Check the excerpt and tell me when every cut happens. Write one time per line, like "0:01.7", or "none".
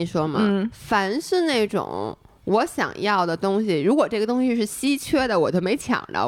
none